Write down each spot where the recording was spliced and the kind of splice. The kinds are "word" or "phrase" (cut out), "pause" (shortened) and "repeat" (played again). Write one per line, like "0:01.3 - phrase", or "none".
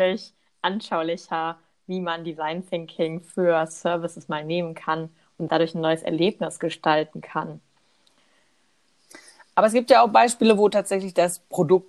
0:05.5 - word